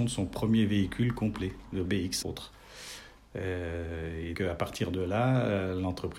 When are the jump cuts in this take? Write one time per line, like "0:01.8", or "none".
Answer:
0:01.9
0:02.2
0:04.4